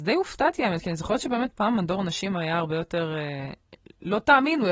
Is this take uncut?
yes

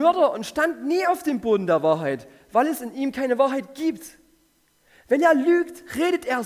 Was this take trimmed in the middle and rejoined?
no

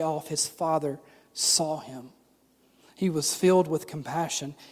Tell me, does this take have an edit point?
no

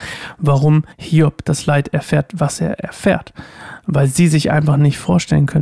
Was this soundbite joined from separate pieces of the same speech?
yes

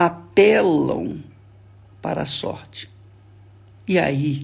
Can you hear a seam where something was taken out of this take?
no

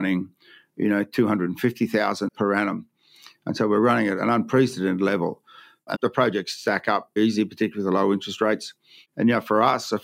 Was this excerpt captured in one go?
no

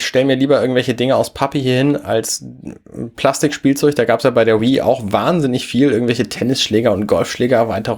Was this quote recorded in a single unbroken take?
yes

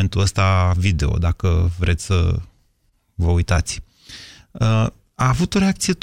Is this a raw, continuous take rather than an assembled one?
yes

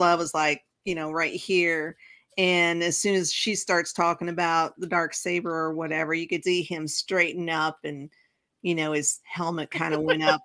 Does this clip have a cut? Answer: yes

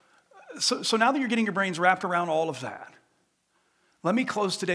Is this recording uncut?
yes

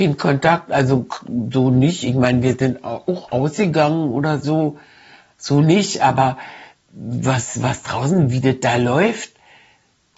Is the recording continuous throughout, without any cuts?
yes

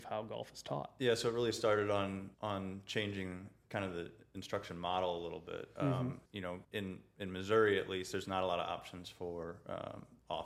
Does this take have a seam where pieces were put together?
yes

